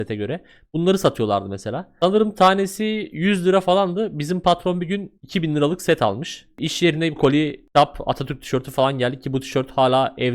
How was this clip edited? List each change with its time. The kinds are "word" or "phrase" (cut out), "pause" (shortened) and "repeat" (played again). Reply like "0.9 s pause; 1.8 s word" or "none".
5.2 s pause; 7.2 s word